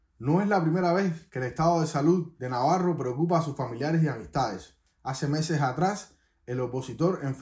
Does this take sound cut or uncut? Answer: uncut